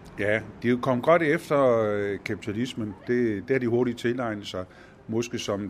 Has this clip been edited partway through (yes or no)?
no